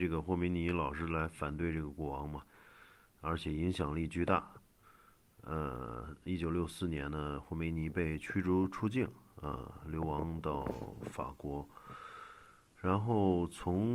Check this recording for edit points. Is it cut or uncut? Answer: uncut